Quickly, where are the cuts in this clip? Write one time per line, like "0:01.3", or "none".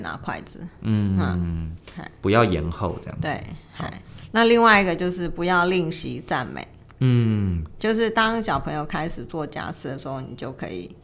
0:07.8